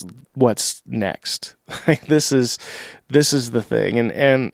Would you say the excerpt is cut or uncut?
uncut